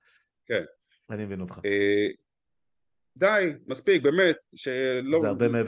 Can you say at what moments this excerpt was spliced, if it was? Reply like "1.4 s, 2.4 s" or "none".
none

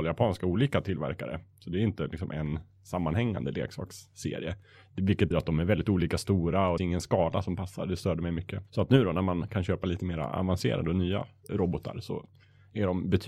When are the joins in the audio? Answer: 5.3 s, 6.8 s, 8.7 s, 11.5 s

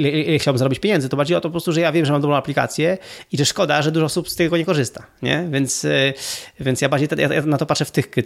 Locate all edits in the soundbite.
1.3 s

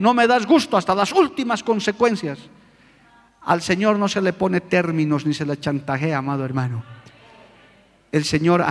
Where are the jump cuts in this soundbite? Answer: none

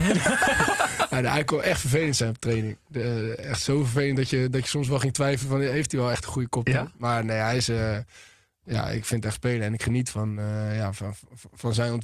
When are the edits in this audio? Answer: 9.3 s

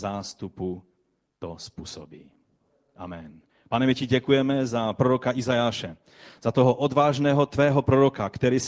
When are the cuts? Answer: 3.5 s

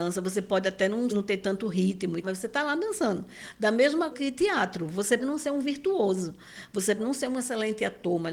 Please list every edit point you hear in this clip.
1.1 s, 2.2 s, 4.1 s, 5.2 s, 7.0 s

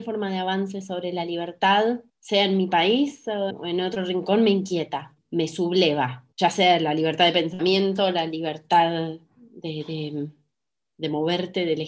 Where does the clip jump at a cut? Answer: 2.1 s, 3.5 s, 5.2 s, 6.3 s

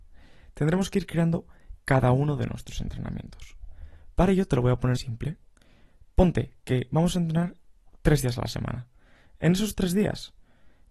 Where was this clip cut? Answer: 5.0 s

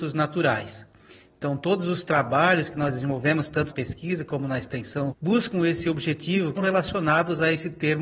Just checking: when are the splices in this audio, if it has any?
3.7 s, 5.1 s, 6.6 s

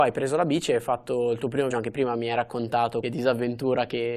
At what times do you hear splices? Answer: 1.7 s, 3.0 s

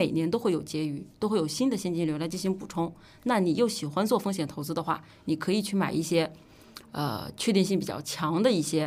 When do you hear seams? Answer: none

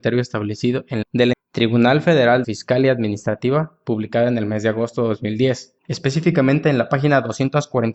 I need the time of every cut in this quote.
1.0 s, 1.3 s, 2.4 s, 5.8 s

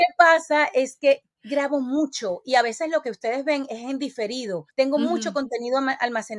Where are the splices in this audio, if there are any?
4.7 s

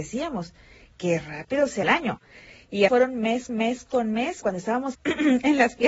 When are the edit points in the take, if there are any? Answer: 1.8 s, 2.9 s, 3.5 s, 4.4 s, 4.9 s

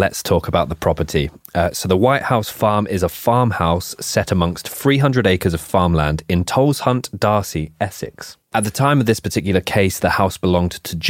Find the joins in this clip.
none

